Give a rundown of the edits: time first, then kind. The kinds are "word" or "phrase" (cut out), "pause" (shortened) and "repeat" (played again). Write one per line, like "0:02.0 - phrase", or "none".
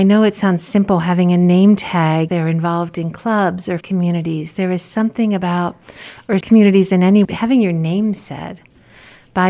0:02.3 - word
0:03.8 - word
0:06.4 - word
0:07.2 - word